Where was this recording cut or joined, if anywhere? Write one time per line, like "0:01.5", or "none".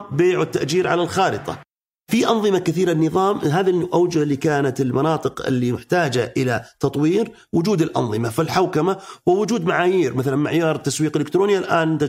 none

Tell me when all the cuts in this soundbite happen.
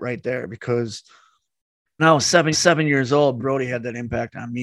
0:02.0
0:02.5
0:03.4

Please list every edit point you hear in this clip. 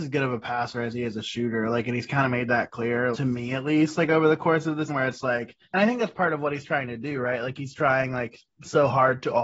0:03.1
0:04.9
0:05.6

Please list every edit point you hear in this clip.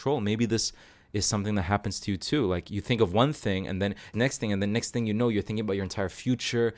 0:04.1

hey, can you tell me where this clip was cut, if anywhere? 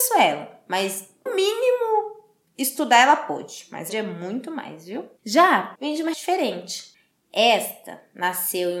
0:01.3
0:03.9
0:05.2
0:05.7
0:06.1

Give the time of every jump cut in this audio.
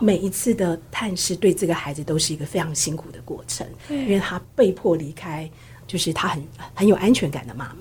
0:05.8

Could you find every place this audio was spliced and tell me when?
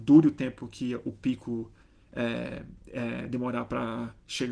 0:01.8

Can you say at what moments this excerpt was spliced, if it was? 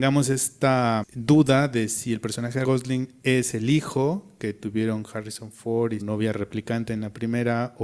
0:01.0
0:02.6
0:06.0

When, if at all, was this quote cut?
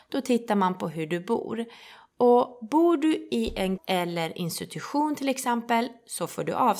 0:03.8

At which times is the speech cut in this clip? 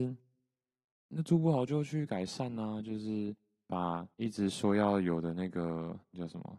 0:04.1

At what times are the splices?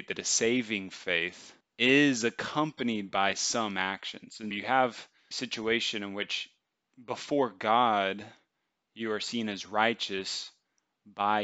0:01.6
0:04.5
0:05.3

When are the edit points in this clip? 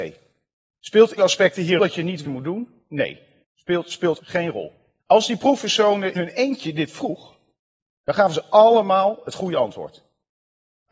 0:01.2
0:01.8
0:02.2
0:03.4
0:04.2
0:05.0
0:06.2

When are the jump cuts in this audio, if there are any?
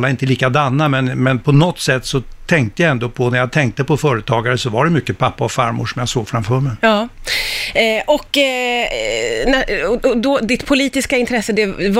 none

